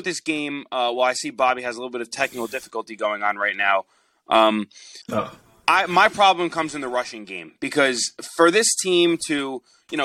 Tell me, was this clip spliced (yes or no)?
yes